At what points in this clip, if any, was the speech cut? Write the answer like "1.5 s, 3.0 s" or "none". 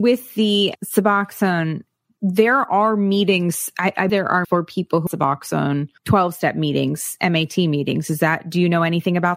4.1 s, 4.4 s, 5.1 s, 6.0 s